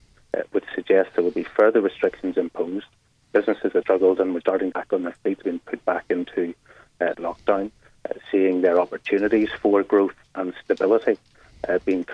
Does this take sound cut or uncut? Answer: cut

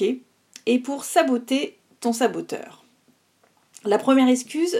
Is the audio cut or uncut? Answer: uncut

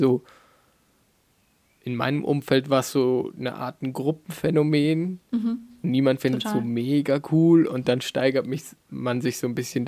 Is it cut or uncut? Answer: uncut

